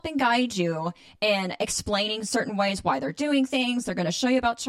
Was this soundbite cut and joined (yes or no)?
no